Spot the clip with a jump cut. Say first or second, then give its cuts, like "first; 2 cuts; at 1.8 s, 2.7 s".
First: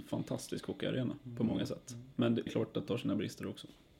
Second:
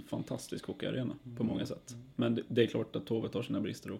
first; 2 cuts; at 2.5 s, 2.9 s